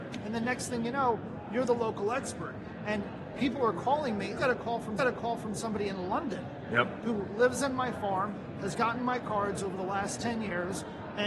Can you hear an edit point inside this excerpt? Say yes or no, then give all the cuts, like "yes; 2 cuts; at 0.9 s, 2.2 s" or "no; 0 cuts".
yes; 2 cuts; at 4.4 s, 5.0 s